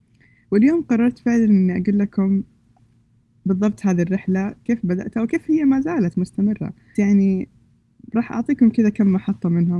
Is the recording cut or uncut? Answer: cut